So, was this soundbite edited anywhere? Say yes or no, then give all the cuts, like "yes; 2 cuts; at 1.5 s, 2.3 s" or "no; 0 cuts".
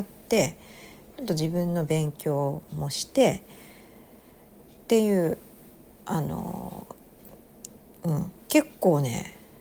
no; 0 cuts